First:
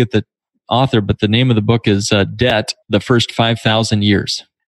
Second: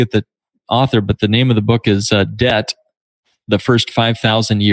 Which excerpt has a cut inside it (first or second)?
first